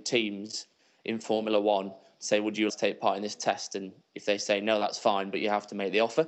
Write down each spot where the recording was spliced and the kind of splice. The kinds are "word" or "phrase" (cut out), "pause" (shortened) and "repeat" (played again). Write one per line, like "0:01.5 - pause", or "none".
0:02.7 - word